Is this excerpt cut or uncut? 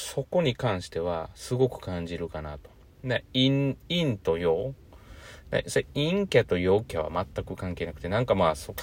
uncut